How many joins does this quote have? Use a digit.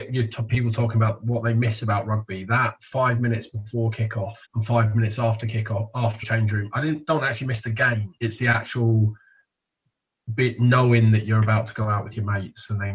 3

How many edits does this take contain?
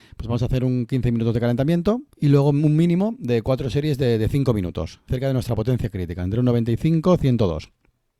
2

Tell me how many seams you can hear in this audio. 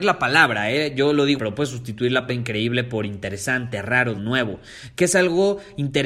3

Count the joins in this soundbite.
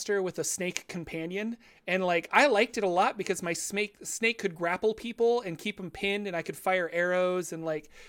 0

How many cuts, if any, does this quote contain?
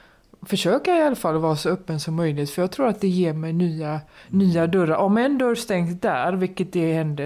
0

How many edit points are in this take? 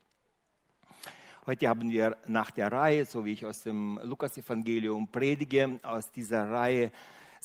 0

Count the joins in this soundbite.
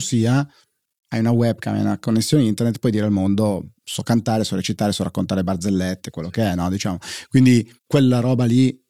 2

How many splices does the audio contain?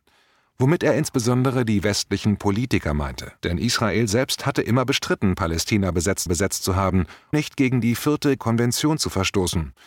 4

